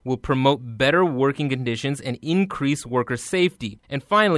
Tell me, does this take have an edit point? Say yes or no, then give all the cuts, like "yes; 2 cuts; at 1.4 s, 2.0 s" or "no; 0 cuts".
no; 0 cuts